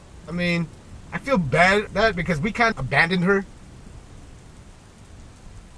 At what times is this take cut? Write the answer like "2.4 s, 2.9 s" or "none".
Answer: 1.9 s, 2.7 s